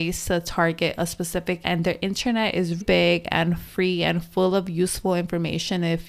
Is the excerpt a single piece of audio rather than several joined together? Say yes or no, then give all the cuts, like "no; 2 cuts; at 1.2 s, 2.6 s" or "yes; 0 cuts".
no; 2 cuts; at 1.6 s, 2.8 s